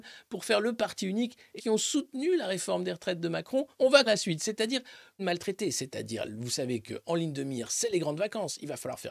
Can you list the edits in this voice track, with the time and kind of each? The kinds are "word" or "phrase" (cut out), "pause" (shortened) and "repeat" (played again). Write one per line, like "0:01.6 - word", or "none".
0:01.6 - phrase
0:03.7 - pause
0:04.1 - word
0:05.2 - word